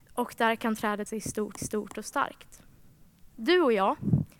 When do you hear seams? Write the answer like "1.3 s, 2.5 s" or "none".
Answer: 1.1 s, 1.6 s, 3.3 s